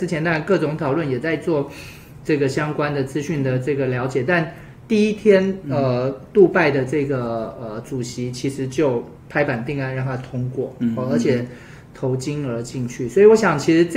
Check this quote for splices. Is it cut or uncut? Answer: cut